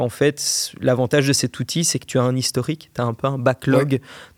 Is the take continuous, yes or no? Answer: yes